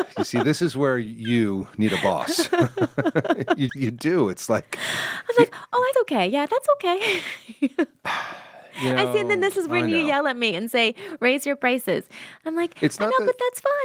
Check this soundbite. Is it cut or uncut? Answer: cut